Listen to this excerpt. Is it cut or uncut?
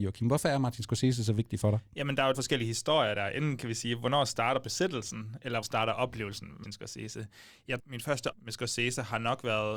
cut